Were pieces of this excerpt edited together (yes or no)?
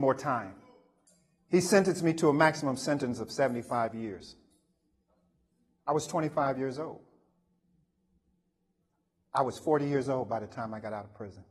no